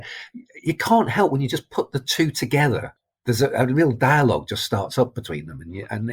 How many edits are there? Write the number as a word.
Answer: zero